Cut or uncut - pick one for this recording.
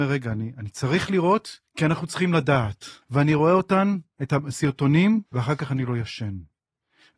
cut